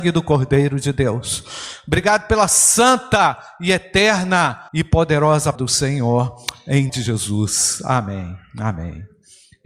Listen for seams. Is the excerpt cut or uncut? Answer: cut